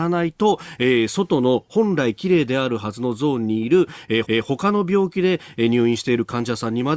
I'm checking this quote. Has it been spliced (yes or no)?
yes